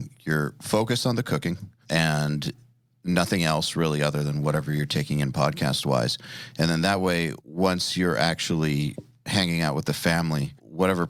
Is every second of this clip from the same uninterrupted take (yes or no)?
yes